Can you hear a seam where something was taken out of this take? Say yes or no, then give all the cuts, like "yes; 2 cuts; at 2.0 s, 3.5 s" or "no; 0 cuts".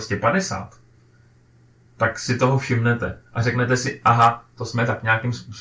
no; 0 cuts